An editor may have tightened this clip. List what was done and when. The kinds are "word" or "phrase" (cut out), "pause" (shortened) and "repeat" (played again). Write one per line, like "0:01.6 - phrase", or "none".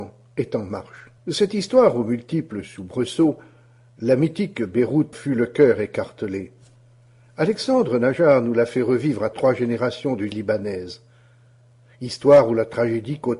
0:01.2 - pause
0:05.1 - word
0:09.3 - word
0:10.3 - word